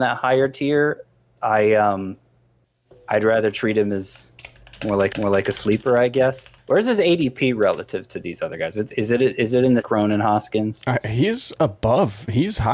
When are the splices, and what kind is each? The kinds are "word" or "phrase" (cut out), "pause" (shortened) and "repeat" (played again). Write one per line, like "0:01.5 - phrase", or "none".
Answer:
0:05.1 - repeat
0:06.6 - pause
0:09.8 - phrase